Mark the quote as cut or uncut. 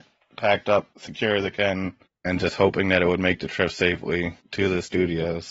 uncut